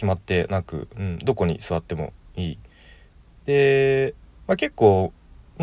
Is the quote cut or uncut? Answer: cut